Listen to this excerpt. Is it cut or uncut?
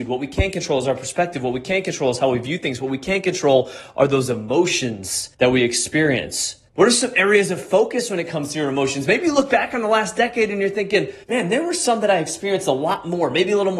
cut